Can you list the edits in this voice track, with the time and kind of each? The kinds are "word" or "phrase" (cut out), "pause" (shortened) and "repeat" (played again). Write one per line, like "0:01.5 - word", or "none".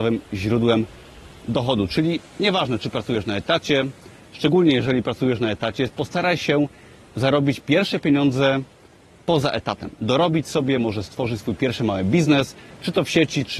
none